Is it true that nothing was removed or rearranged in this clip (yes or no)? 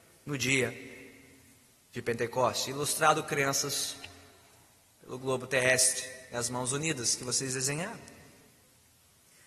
yes